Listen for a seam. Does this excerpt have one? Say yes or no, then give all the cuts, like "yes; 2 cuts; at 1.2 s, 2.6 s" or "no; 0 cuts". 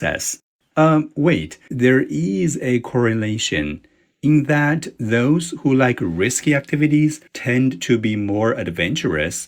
yes; 2 cuts; at 1.7 s, 7.3 s